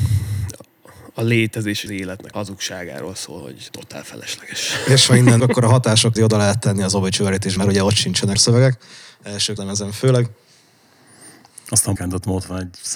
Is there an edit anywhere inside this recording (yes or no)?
yes